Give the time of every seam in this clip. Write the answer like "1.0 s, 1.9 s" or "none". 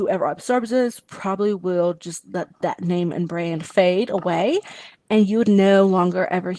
none